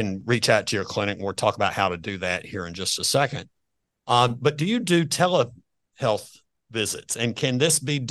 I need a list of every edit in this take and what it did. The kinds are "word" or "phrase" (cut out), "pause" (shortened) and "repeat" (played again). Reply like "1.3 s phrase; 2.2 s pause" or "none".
none